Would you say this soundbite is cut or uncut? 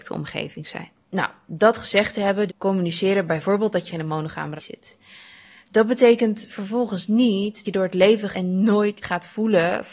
cut